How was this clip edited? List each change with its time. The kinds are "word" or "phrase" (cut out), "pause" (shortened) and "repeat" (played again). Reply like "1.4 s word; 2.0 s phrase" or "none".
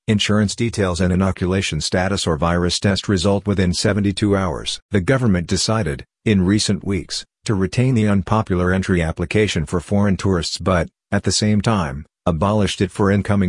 4.8 s pause